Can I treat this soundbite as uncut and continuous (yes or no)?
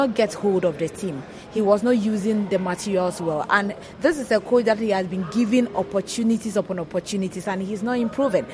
yes